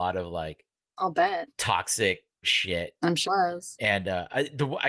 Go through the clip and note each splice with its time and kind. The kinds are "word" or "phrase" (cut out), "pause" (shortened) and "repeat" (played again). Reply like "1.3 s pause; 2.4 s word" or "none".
2.4 s word; 3.2 s word